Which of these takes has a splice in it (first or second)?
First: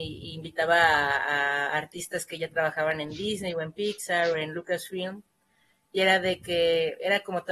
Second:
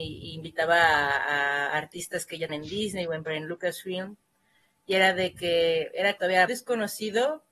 second